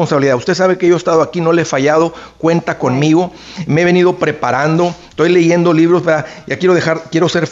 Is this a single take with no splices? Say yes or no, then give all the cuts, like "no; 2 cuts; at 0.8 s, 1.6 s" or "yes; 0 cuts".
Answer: yes; 0 cuts